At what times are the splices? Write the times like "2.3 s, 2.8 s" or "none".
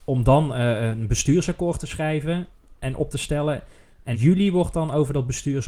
4.1 s